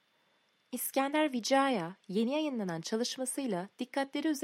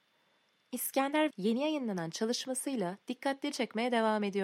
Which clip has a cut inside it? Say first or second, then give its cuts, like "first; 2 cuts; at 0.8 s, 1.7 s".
second; 2 cuts; at 1.3 s, 3.5 s